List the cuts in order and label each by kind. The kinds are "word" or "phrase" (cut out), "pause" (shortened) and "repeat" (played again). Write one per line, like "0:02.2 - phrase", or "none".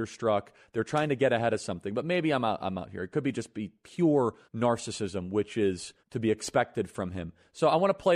0:04.4 - pause
0:06.0 - pause